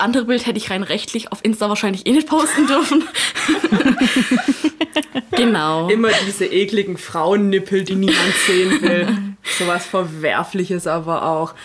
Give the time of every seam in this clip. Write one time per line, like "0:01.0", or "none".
none